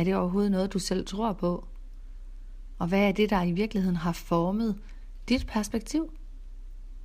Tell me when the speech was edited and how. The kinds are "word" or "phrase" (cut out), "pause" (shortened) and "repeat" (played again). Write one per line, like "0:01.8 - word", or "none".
none